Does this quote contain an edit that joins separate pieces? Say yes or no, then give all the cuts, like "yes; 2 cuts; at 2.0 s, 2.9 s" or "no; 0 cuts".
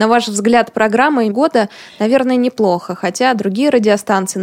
yes; 1 cut; at 1.3 s